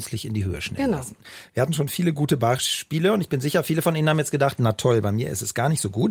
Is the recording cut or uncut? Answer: uncut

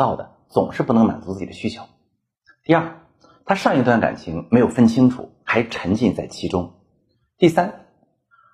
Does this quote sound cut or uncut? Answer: uncut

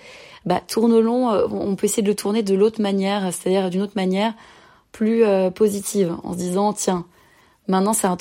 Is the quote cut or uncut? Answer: uncut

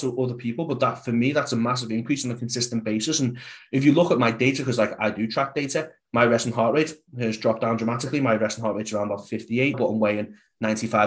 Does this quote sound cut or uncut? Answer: cut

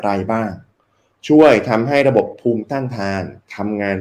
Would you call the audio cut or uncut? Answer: uncut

